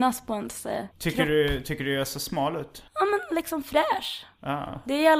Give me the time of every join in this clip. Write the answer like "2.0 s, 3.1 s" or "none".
0.9 s, 2.9 s